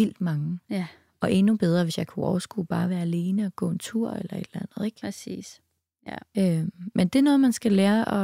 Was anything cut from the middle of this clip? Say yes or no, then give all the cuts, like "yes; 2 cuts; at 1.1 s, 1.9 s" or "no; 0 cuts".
no; 0 cuts